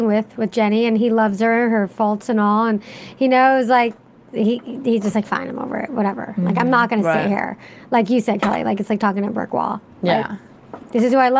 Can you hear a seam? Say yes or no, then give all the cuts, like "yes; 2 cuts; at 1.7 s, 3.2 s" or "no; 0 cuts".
no; 0 cuts